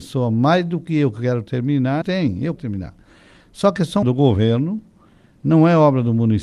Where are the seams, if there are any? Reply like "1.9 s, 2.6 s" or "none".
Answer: 2.0 s, 2.6 s, 4.0 s